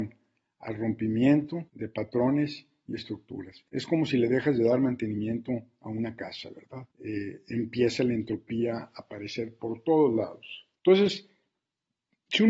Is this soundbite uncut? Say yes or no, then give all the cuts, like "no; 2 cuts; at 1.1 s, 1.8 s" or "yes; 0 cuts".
no; 4 cuts; at 1.7 s, 3.7 s, 6.9 s, 10.8 s